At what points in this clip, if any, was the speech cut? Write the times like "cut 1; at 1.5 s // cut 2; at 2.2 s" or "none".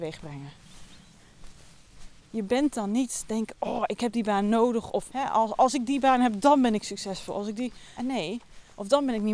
cut 1; at 5.1 s // cut 2; at 8.0 s